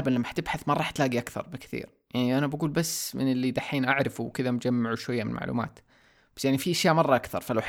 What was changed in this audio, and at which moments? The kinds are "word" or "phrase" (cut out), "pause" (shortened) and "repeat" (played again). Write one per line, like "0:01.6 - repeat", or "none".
none